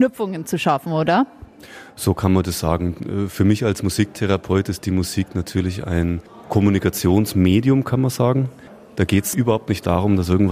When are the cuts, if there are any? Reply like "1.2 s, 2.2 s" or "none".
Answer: none